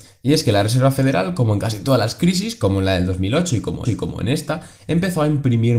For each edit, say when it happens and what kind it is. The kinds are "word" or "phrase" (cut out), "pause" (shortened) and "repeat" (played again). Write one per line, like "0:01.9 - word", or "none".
0:03.9 - repeat